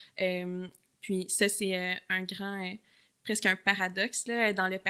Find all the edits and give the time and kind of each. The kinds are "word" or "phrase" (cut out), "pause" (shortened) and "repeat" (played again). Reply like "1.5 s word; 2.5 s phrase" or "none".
none